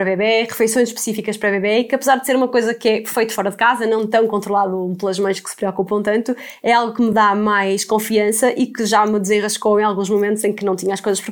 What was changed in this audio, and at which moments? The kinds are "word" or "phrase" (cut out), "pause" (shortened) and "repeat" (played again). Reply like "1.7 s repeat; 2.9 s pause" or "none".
none